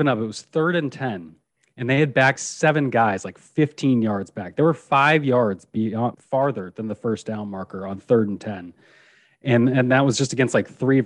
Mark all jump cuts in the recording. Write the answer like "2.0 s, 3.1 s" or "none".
2.4 s, 6.1 s